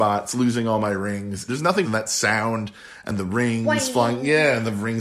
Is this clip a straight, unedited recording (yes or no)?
no